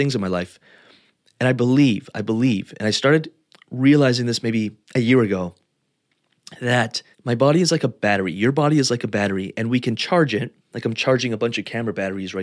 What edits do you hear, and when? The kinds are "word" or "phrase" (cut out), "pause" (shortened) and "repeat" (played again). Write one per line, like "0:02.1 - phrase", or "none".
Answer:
0:03.5 - pause
0:04.8 - pause
0:07.1 - pause

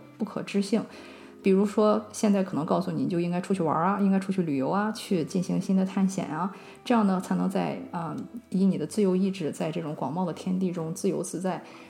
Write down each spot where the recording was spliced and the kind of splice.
none

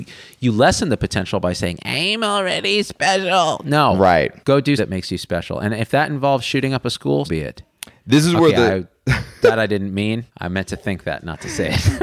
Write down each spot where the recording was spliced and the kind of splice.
0:04.4 - pause
0:04.8 - word
0:07.3 - word
0:10.3 - pause

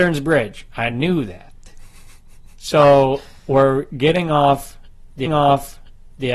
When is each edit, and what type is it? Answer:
0:05.3 - repeat

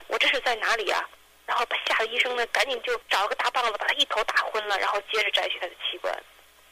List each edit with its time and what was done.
0:01.1 - pause

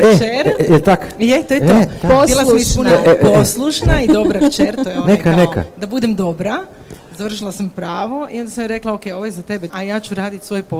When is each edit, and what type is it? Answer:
0:09.7 - word

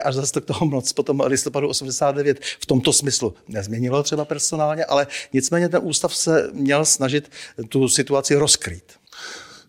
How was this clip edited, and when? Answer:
none

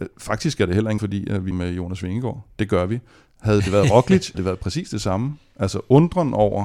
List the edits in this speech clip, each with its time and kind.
0:01.0 - word
0:01.5 - word
0:04.3 - word

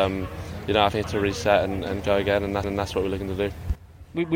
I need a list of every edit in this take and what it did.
0:01.0 - phrase
0:02.6 - repeat

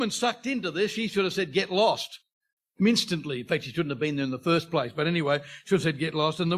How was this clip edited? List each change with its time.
none

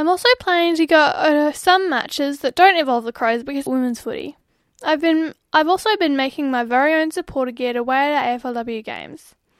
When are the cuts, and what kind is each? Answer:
0:03.7 - phrase
0:04.5 - pause

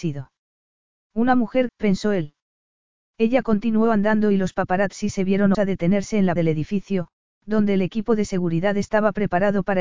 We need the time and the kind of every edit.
0:01.7 - word
0:05.5 - word
0:06.4 - word

